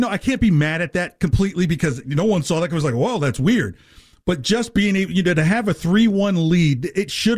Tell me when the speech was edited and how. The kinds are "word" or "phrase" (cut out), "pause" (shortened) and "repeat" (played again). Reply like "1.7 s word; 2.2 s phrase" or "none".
none